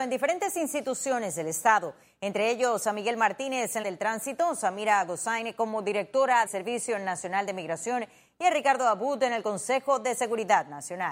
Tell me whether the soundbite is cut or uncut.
cut